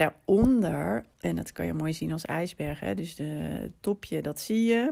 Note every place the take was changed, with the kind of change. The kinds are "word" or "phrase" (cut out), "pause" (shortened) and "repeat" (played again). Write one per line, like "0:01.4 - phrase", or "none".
0:01.1 - pause

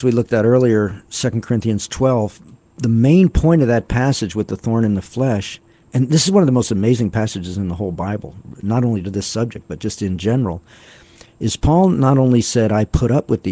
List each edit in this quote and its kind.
none

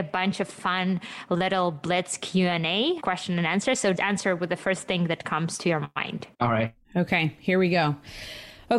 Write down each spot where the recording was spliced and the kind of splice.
0:03.0 - word
0:03.9 - word
0:06.3 - pause
0:06.8 - pause

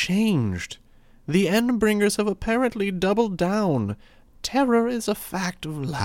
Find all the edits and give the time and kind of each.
none

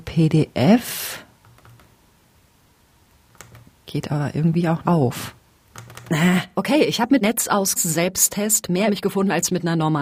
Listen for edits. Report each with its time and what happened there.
0:04.8 - word
0:07.2 - word
0:07.8 - word
0:08.9 - word

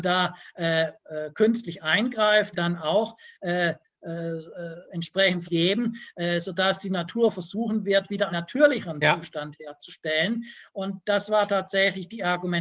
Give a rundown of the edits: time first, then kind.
0:02.5 - word
0:05.4 - phrase
0:08.3 - word

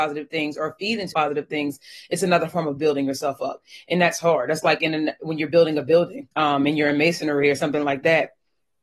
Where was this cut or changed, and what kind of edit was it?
0:01.1 - word
0:06.3 - pause

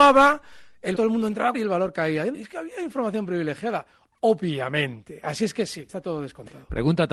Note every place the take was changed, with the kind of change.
0:00.9 - word
0:01.5 - word
0:02.3 - word
0:05.9 - word

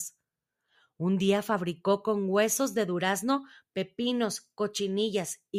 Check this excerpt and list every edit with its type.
none

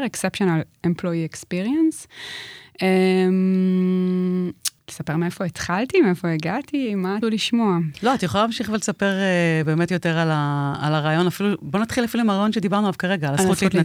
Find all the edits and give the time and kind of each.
0:04.8 - pause
0:07.2 - word
0:09.9 - word

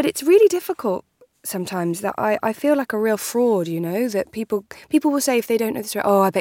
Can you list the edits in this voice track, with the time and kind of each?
none

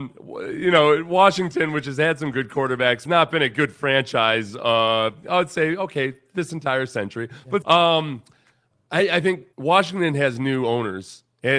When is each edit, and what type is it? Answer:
0:03.1 - phrase
0:07.6 - word
0:09.5 - pause

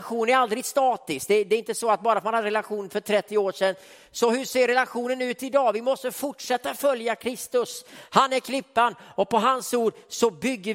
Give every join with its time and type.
none

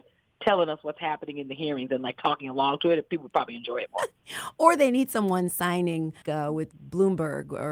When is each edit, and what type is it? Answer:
0:06.2 - word

